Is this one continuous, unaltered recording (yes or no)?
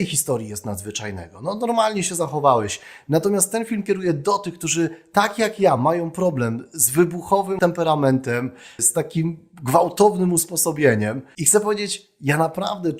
yes